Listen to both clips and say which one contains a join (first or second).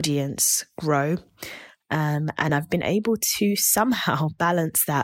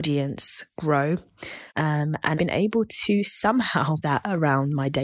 second